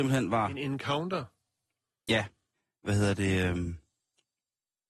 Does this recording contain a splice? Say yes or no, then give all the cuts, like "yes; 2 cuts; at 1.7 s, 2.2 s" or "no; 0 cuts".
no; 0 cuts